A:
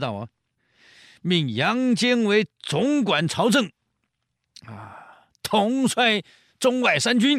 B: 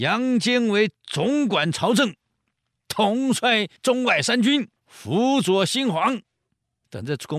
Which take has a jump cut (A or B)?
B